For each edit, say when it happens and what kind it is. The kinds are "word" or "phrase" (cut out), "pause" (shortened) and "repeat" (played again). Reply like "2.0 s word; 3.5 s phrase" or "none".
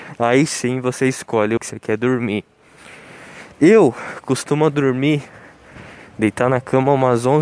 1.6 s word; 3.5 s pause